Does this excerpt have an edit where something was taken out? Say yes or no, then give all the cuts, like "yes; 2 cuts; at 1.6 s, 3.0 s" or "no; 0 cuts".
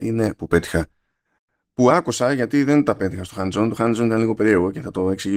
no; 0 cuts